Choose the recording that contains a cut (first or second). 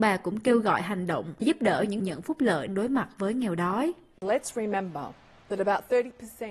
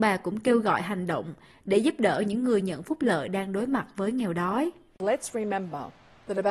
first